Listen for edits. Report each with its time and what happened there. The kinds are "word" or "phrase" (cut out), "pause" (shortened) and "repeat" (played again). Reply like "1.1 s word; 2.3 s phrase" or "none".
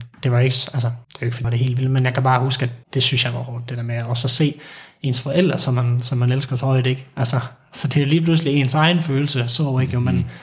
1.0 s pause; 1.4 s word; 2.8 s pause